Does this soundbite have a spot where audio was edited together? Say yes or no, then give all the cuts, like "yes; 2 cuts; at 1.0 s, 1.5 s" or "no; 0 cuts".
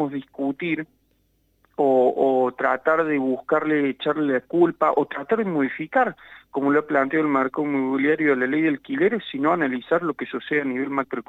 no; 0 cuts